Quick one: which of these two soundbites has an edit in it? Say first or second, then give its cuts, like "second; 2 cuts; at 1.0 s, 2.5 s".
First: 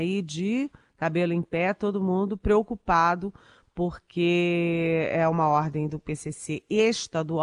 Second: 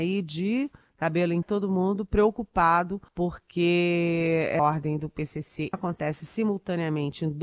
second; 4 cuts; at 1.4 s, 3.1 s, 4.6 s, 5.7 s